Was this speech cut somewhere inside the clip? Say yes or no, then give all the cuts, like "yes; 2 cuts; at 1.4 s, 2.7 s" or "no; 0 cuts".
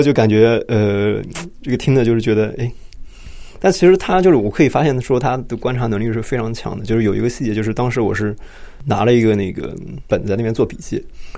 no; 0 cuts